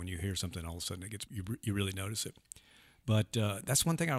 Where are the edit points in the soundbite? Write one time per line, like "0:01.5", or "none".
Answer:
0:01.3